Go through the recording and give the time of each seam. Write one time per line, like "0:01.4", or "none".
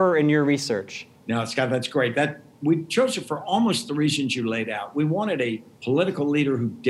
0:01.2
0:05.7

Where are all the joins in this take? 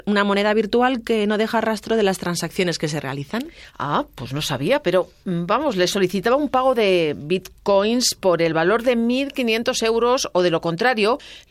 0:03.7

